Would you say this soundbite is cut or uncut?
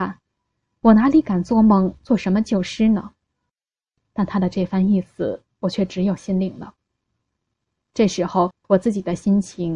uncut